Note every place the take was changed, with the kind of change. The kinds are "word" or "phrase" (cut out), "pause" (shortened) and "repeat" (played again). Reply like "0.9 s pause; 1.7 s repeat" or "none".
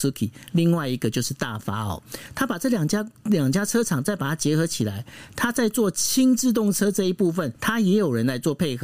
7.6 s pause